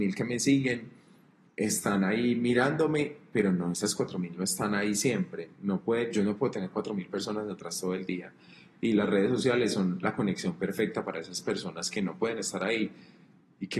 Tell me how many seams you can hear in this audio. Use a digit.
0